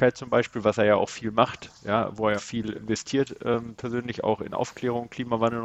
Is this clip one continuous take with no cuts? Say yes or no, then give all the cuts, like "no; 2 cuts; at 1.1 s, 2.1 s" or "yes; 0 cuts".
no; 2 cuts; at 2.4 s, 2.7 s